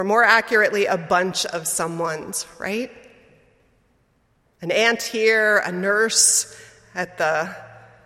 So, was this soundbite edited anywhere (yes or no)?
no